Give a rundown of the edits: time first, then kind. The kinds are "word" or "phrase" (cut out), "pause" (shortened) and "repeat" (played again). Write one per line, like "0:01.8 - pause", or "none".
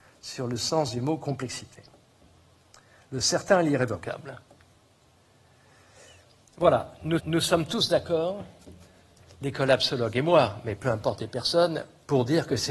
0:07.2 - repeat